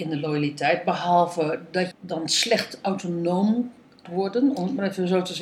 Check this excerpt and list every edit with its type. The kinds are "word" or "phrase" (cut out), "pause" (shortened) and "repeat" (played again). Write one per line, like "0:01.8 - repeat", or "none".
0:01.9 - word
0:04.1 - word